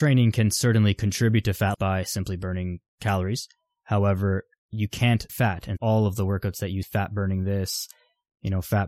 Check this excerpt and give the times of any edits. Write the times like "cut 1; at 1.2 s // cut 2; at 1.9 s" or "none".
cut 1; at 1.7 s // cut 2; at 5.3 s // cut 3; at 5.8 s // cut 4; at 6.8 s